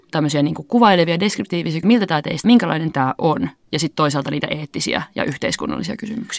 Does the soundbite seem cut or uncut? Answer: cut